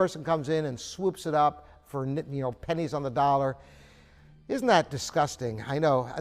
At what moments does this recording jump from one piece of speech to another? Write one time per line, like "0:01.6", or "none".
none